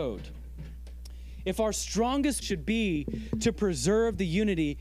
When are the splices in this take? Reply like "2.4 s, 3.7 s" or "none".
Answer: 2.4 s